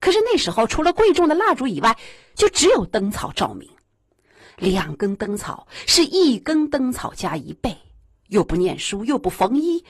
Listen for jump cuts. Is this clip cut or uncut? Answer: uncut